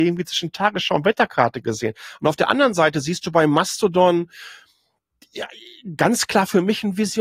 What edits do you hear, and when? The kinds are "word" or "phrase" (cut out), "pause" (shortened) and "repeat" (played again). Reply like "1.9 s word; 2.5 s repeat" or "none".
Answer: none